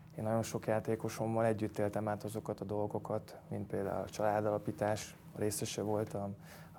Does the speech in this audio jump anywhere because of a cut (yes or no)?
no